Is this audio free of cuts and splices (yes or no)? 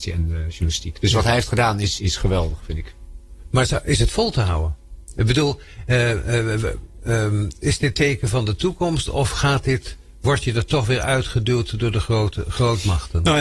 no